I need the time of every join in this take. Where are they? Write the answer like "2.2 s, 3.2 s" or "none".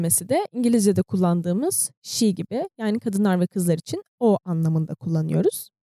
none